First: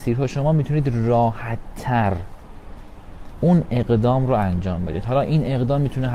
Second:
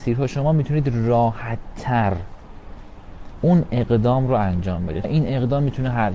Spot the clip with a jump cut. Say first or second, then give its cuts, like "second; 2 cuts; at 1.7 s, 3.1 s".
second; 1 cut; at 5.0 s